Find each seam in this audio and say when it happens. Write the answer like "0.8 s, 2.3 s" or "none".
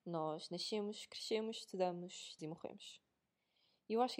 2.4 s